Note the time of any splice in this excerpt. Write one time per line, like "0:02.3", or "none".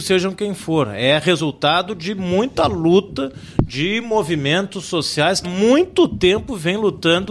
0:05.4